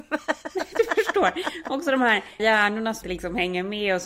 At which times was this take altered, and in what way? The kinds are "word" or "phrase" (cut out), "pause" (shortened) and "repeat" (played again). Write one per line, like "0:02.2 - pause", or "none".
0:02.4 - word
0:03.0 - word

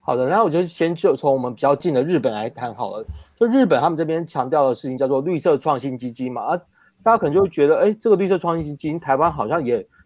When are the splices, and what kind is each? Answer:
none

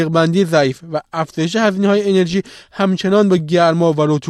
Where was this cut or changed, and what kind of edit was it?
none

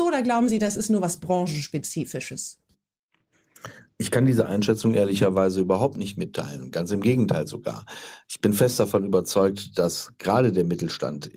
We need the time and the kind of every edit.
none

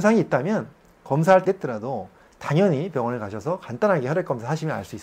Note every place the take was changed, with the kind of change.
0:01.4 - phrase

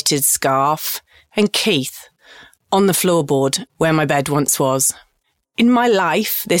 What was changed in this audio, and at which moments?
none

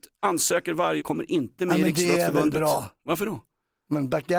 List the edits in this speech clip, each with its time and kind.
0:01.0 - word

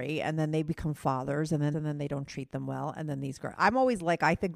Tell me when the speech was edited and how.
0:01.7 - phrase

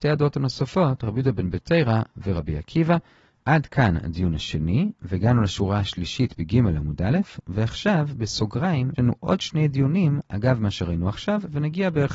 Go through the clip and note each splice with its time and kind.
0:09.0 - word

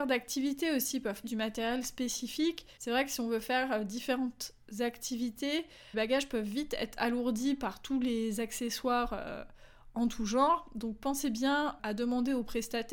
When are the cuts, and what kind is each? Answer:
0:01.2 - word
0:02.8 - pause
0:05.9 - word

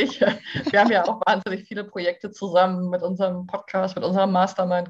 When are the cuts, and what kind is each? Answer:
none

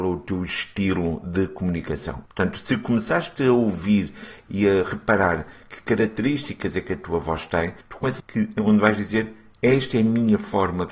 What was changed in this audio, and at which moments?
0:02.3 - pause
0:07.8 - pause
0:08.2 - phrase

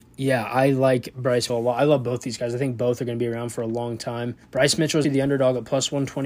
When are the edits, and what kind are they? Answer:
0:01.5 - word
0:04.4 - pause
0:05.0 - word

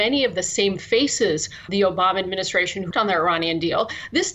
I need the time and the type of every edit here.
0:01.7 - word
0:02.9 - word

